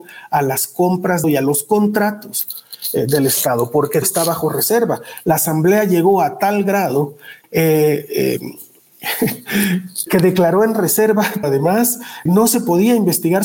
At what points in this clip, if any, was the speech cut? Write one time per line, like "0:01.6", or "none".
0:01.2
0:04.0
0:07.4
0:10.1
0:11.4
0:12.3